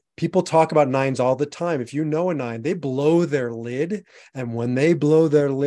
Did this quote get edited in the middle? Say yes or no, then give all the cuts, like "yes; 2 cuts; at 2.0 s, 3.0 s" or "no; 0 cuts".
no; 0 cuts